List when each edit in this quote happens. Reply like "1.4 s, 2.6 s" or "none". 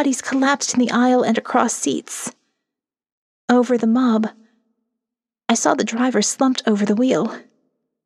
none